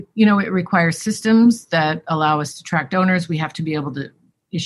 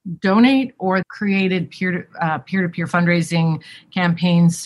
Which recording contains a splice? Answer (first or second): second